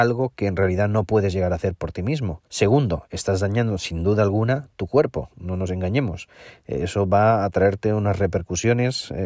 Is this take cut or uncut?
cut